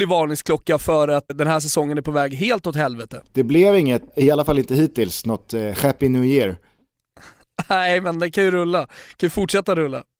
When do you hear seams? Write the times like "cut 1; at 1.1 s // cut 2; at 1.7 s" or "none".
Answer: cut 1; at 1.3 s // cut 2; at 4.1 s